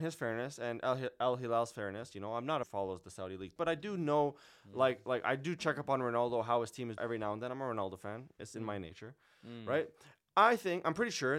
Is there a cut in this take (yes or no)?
yes